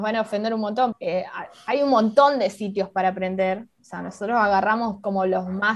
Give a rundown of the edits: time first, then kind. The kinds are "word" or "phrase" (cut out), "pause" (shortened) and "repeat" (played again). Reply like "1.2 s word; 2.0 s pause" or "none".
0.9 s word